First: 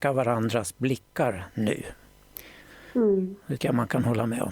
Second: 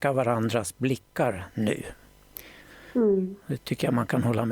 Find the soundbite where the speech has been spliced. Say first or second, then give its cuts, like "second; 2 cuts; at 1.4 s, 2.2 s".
first; 1 cut; at 3.6 s